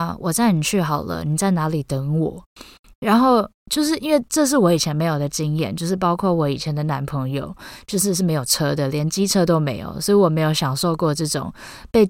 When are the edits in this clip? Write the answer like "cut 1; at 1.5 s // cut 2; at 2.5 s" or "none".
cut 1; at 2.5 s // cut 2; at 3.6 s